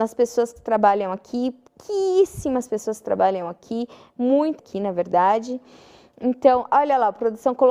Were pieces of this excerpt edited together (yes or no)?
yes